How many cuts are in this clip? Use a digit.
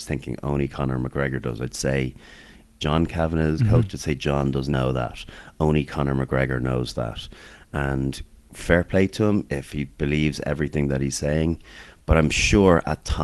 1